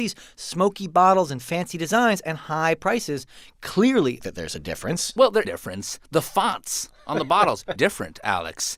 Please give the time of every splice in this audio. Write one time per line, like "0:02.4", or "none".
0:04.2
0:05.4
0:06.0
0:07.8